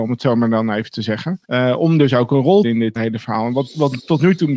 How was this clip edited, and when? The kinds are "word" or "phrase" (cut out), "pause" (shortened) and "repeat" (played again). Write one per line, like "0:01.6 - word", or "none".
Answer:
0:01.4 - pause
0:02.6 - phrase
0:03.0 - word